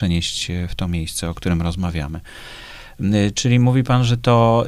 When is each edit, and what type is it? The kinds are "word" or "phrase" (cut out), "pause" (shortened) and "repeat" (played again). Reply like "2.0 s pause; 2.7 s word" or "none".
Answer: none